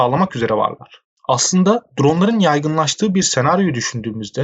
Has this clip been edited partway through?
no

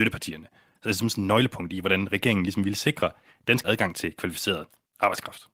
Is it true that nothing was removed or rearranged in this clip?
no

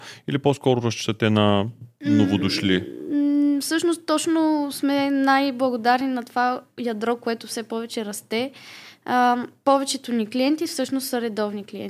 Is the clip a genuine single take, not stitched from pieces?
yes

